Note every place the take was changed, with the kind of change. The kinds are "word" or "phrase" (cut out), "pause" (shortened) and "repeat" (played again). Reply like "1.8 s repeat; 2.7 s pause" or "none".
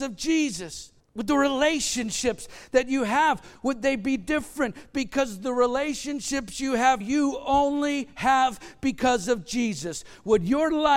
1.0 s pause; 7.0 s word